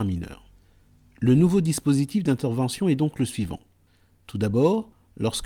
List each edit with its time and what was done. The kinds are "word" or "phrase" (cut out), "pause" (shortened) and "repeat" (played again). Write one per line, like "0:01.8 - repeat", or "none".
none